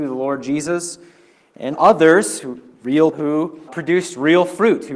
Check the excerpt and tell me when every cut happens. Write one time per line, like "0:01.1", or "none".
0:01.7
0:03.1
0:03.7